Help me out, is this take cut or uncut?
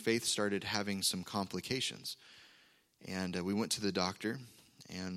uncut